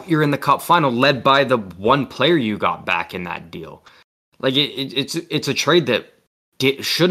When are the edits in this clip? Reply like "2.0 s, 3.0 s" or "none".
none